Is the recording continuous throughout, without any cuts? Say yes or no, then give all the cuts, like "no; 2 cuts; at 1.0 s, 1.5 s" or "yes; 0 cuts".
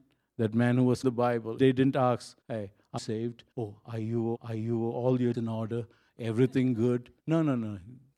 no; 8 cuts; at 1.0 s, 1.6 s, 2.4 s, 3.0 s, 3.5 s, 4.3 s, 5.3 s, 7.2 s